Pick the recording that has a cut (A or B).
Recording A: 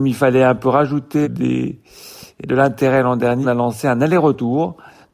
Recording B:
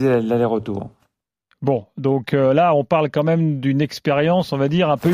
A